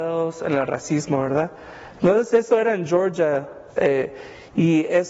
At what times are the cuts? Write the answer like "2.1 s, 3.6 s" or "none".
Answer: 3.7 s